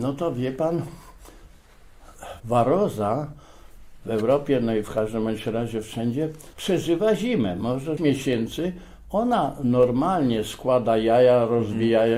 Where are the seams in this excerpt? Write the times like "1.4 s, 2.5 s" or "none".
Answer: 2.4 s, 6.5 s, 8.0 s